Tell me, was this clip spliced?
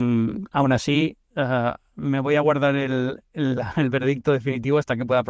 no; 0 cuts

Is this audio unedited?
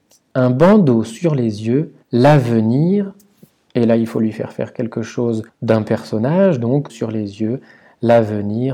no; 3 cuts; at 2.0 s, 5.5 s, 6.9 s

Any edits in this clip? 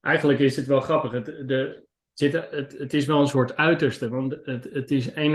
no; 0 cuts

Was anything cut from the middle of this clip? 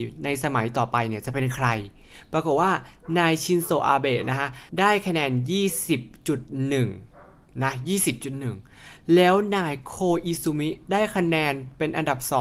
yes; 1 cut; at 4.7 s

